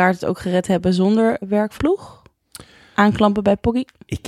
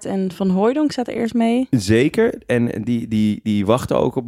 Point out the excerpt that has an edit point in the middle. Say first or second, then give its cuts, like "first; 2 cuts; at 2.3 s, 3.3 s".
first; 2 cuts; at 1.4 s, 1.8 s